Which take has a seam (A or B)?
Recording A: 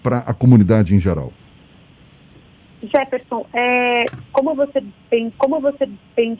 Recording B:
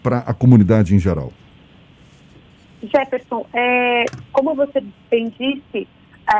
A